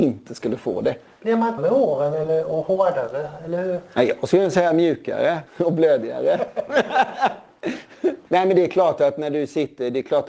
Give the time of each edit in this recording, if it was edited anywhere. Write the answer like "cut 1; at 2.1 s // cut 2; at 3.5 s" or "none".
cut 1; at 1.6 s // cut 2; at 5.5 s